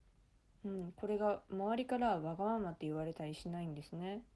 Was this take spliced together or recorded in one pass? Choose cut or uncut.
uncut